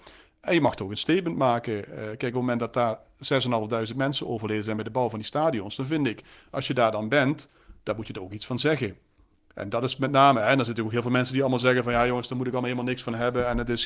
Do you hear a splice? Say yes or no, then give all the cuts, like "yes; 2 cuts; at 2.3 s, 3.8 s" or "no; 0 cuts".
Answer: no; 0 cuts